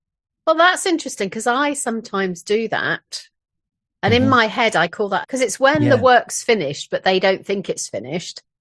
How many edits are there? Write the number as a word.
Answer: one